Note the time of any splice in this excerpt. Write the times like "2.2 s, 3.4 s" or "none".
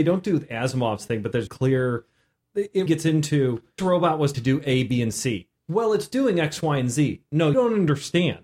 1.5 s, 2.9 s, 3.8 s, 4.3 s, 7.5 s